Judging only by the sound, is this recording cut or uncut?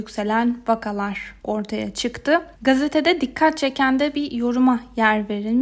cut